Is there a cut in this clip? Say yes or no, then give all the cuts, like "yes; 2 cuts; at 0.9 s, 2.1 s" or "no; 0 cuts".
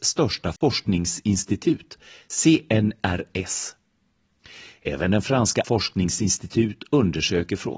yes; 1 cut; at 5.6 s